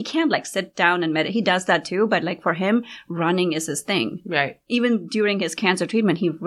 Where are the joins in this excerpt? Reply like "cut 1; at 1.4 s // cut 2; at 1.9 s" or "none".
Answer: none